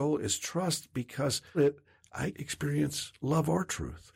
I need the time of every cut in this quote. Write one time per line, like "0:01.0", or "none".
0:01.5
0:02.3